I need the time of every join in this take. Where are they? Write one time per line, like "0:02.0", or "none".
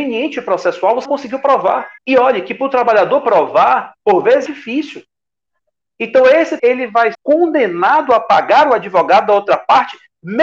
0:01.0
0:02.0
0:04.0
0:04.5
0:05.5
0:06.6
0:07.1